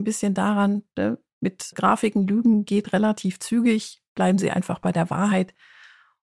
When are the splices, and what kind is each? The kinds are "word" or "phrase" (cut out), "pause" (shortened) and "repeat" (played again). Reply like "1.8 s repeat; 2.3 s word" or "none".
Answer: 1.7 s word